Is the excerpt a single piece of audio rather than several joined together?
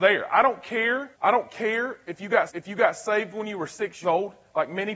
no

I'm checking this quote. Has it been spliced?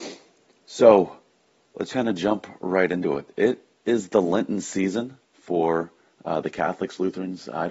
yes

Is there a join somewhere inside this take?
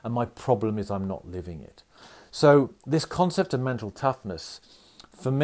no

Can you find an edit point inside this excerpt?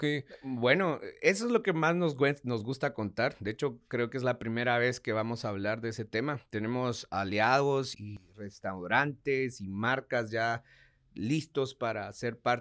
yes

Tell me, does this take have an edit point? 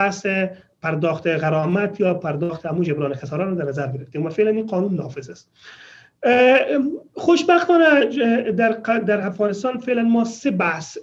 no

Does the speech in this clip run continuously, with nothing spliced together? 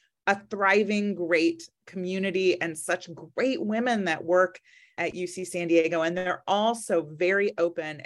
yes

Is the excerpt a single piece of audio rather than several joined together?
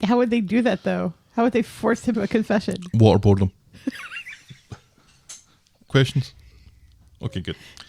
no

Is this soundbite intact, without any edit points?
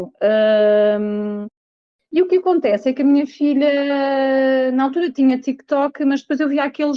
yes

